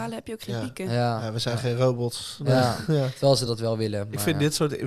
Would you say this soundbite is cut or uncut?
uncut